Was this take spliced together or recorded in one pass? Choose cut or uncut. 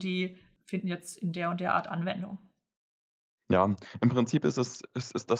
uncut